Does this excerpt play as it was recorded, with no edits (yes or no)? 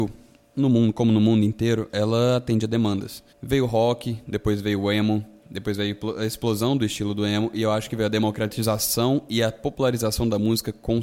no